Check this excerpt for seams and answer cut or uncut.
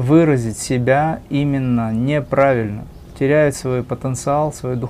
uncut